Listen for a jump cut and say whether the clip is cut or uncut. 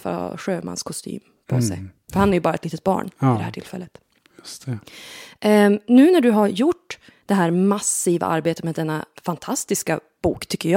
uncut